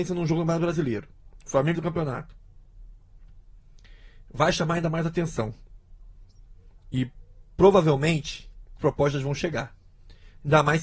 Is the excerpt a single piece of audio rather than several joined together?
no; 2 cuts; at 1.7 s, 8.8 s

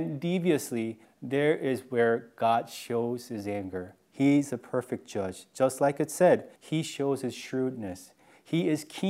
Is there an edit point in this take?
yes; 2 cuts; at 1.0 s, 6.6 s

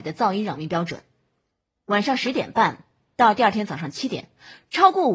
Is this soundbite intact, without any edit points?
yes; 0 cuts

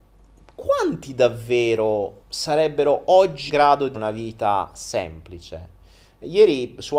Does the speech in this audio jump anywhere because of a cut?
yes; 3 cuts; at 2.2 s, 3.5 s, 3.9 s

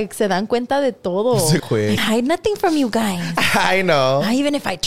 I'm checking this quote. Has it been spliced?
yes; 2 cuts; at 1.6 s, 2.0 s

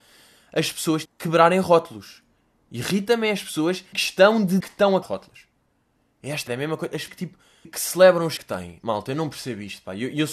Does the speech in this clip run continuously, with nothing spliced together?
no; 8 cuts; at 1.1 s, 3.9 s, 4.6 s, 5.0 s, 6.5 s, 7.1 s, 7.6 s, 8.4 s

